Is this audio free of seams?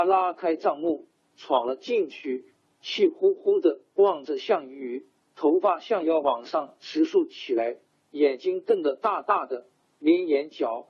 yes; 0 cuts

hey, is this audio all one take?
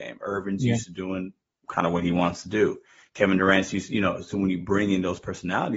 yes; 0 cuts

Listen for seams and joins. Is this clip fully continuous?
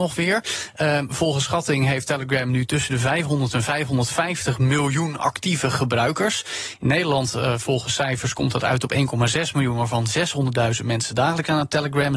yes; 0 cuts

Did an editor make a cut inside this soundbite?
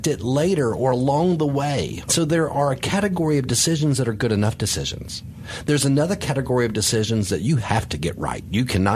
no; 0 cuts

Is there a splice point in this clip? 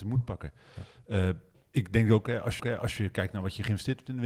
yes; 1 cut; at 2.6 s

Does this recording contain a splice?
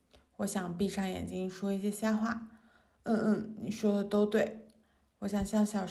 no; 0 cuts

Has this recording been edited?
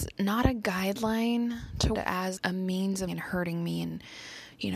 yes; 3 cuts; at 1.9 s, 2.4 s, 3.1 s

